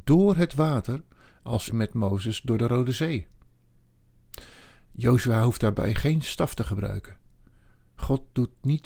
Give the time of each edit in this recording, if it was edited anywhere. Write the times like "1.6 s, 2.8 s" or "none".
1.7 s